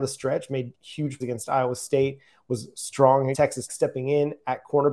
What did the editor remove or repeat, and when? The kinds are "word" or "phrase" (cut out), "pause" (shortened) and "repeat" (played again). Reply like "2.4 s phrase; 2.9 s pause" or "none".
1.2 s word; 3.3 s word; 3.7 s word